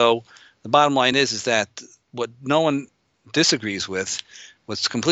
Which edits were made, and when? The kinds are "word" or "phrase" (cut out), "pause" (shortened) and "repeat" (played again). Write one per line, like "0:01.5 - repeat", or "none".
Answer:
none